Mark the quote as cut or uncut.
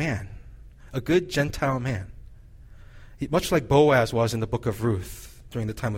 uncut